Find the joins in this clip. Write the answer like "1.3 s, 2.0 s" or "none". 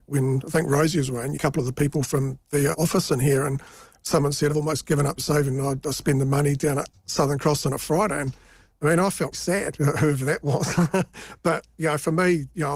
1.3 s, 2.7 s, 4.5 s, 9.3 s